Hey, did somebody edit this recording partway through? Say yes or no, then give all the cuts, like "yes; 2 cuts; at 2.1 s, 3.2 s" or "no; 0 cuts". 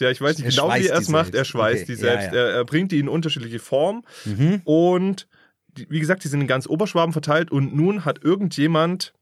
no; 0 cuts